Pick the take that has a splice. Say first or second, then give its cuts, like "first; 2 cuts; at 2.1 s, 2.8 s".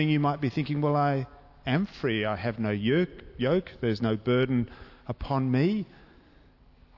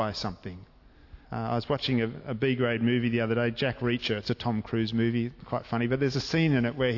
second; 1 cut; at 1.2 s